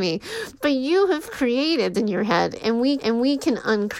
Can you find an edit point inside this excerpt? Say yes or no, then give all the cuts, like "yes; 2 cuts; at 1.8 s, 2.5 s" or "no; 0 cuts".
yes; 2 cuts; at 1.9 s, 3.0 s